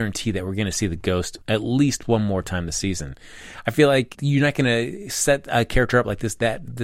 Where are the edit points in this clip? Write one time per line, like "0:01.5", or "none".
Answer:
0:01.4
0:04.1